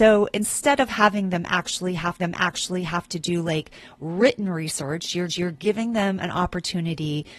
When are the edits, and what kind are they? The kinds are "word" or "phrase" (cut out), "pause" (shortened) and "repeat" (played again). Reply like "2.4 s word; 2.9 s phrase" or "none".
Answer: 2.2 s repeat; 5.3 s repeat